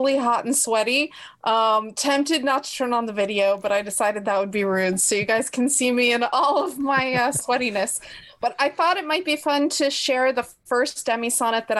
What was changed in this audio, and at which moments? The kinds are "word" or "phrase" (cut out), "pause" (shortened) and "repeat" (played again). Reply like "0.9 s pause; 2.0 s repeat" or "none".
none